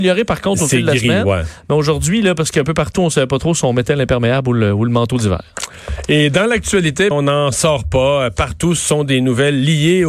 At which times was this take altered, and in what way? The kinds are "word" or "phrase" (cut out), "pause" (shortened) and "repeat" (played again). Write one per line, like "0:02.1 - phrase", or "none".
0:07.1 - word